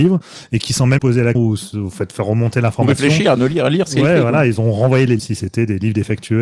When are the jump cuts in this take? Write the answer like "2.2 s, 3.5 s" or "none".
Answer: 1.0 s, 1.3 s, 5.2 s